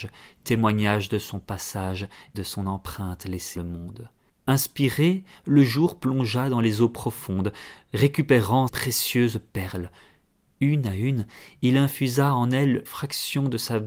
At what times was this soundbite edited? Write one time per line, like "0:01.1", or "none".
0:02.3
0:03.6
0:08.7
0:12.9